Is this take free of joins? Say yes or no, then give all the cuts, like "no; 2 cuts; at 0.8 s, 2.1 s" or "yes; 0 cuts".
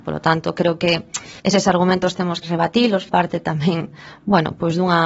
no; 3 cuts; at 1.4 s, 2.4 s, 3.1 s